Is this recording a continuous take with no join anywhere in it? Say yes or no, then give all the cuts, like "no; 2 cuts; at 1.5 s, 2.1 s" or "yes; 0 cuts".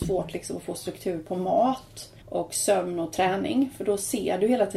no; 1 cut; at 2.2 s